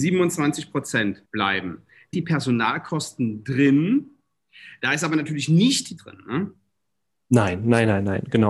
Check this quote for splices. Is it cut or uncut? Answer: cut